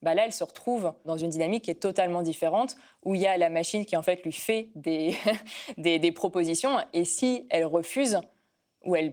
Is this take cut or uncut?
uncut